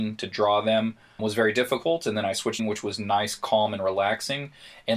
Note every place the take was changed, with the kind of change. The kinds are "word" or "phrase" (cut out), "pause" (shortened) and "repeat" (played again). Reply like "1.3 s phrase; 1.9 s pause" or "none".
1.2 s word; 2.6 s phrase